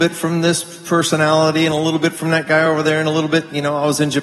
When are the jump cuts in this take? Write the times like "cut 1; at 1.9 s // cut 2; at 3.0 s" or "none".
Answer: none